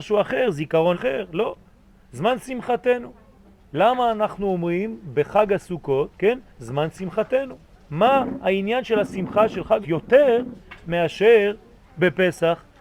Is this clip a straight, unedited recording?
no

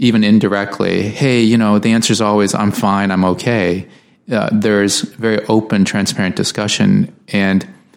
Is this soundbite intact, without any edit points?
yes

